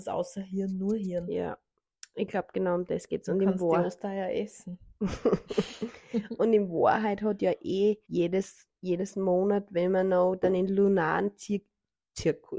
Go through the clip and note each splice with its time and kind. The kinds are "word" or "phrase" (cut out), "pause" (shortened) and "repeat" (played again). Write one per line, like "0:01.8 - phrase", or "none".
0:08.0 - pause